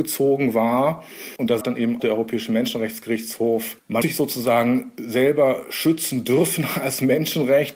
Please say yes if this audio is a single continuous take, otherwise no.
no